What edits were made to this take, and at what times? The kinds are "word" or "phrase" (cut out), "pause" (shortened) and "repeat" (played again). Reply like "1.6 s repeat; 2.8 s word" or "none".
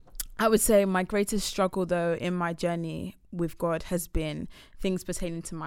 none

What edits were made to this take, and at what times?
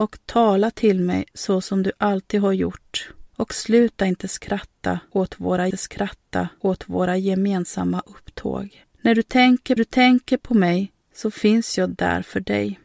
3.3 s pause; 5.7 s repeat; 8.9 s pause; 9.8 s repeat; 11.0 s pause

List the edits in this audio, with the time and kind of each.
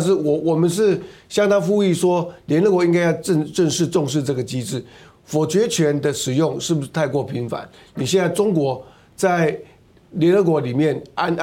none

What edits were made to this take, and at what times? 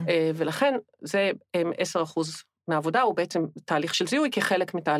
none

